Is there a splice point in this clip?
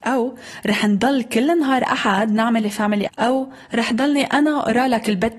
yes; 1 cut; at 3.1 s

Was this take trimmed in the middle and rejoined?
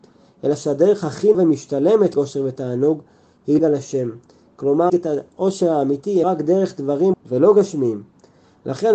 yes; 6 cuts; at 1.3 s, 2.1 s, 3.6 s, 4.9 s, 6.2 s, 7.1 s

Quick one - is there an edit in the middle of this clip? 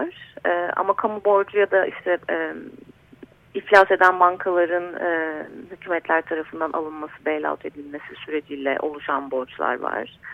no; 0 cuts

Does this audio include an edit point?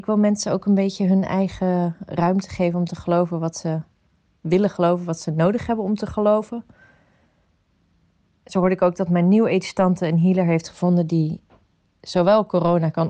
no; 0 cuts

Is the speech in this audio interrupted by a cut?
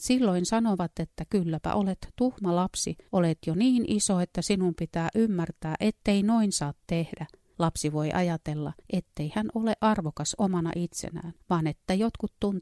yes; 3 cuts; at 3.1 s, 8.8 s, 11.4 s

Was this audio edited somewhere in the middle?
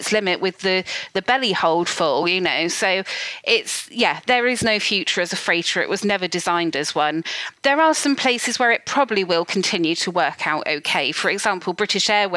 no; 0 cuts

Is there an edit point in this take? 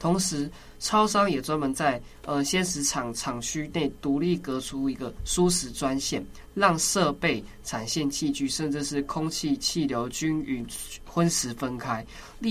no; 0 cuts

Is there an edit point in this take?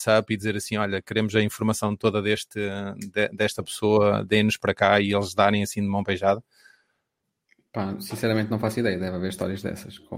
no; 0 cuts

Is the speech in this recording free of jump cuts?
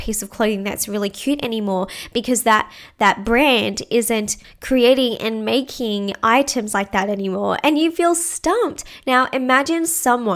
yes; 0 cuts

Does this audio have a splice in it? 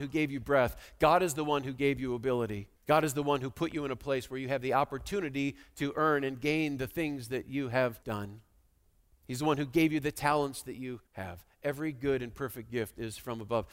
yes; 3 cuts; at 2.8 s, 8.0 s, 11.1 s

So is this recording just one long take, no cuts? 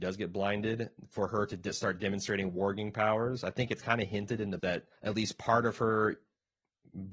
no; 2 cuts; at 4.6 s, 5.0 s

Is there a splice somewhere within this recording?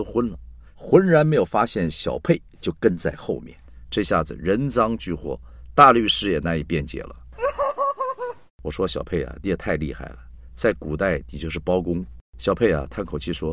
yes; 1 cut; at 12.3 s

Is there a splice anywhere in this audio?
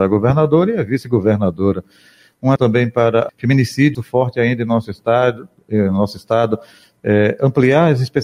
yes; 3 cuts; at 2.6 s, 3.3 s, 3.9 s

